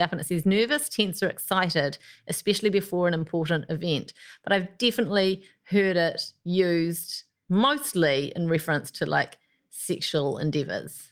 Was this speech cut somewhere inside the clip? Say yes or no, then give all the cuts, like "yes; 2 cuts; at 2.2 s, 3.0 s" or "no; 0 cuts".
no; 0 cuts